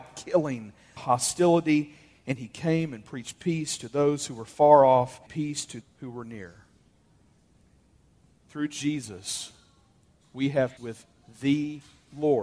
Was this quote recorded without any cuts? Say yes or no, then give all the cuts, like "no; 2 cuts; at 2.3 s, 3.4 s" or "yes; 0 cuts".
no; 4 cuts; at 1.0 s, 5.3 s, 5.8 s, 10.8 s